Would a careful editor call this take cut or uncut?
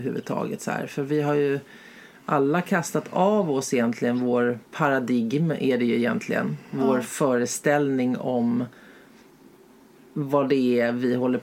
cut